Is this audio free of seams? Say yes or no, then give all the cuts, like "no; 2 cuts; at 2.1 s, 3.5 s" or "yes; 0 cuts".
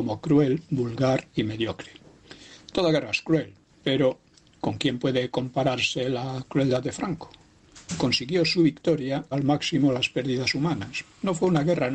no; 2 cuts; at 3.7 s, 9.3 s